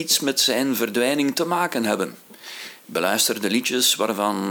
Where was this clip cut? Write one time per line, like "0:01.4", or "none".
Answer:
none